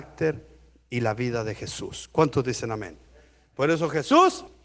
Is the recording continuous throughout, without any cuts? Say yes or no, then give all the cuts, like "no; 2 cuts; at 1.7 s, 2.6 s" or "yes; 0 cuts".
yes; 0 cuts